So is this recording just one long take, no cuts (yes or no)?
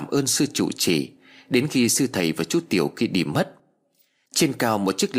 yes